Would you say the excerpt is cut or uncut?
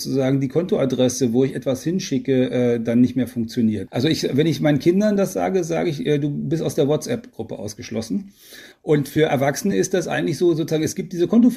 uncut